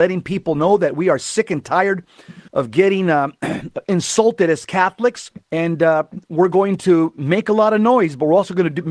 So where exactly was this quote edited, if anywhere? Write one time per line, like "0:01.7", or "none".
0:02.5
0:05.4